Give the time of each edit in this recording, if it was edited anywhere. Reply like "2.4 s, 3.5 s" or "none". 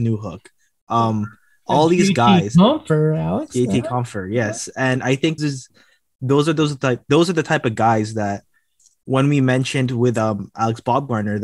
5.4 s

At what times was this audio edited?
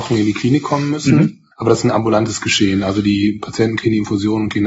1.5 s

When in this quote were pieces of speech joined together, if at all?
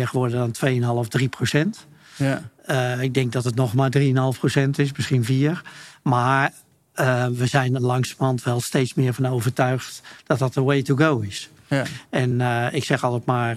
none

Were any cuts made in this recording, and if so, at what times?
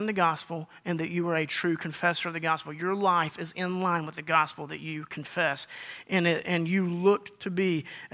none

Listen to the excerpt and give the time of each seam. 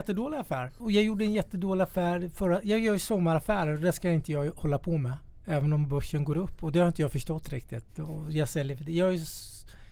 none

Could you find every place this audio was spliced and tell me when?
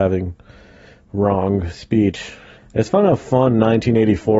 2.6 s

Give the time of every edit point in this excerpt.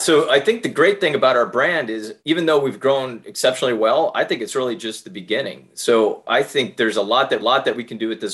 2.2 s, 7.4 s

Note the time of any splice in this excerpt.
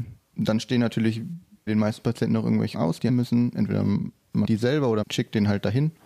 1.7 s, 2.7 s, 3.1 s, 4.4 s, 5.0 s

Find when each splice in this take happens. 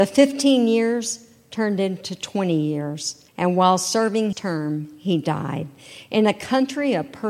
3.3 s, 4.3 s

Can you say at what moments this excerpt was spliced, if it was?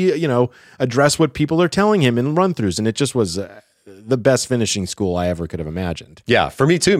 none

